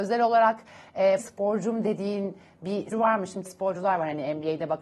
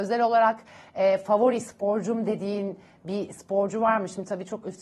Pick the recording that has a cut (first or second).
first